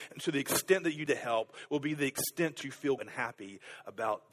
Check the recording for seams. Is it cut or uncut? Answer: cut